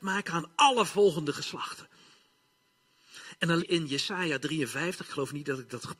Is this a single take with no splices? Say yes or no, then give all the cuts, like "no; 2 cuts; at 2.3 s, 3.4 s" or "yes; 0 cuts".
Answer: no; 1 cut; at 3.6 s